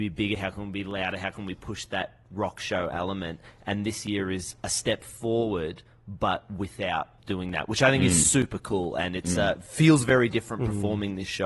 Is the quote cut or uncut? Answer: cut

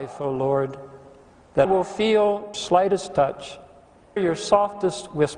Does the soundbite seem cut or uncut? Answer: cut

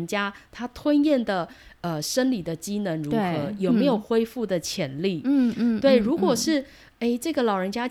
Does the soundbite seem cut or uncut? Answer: uncut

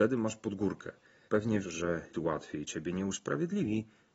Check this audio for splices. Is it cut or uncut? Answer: cut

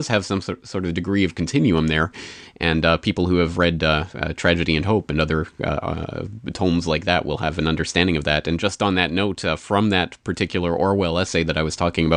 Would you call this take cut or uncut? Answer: uncut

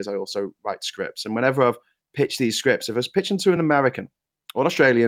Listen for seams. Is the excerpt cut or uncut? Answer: uncut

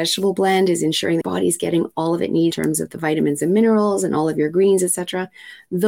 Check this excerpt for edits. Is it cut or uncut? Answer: cut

